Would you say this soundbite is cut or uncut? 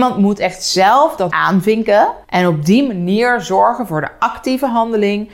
cut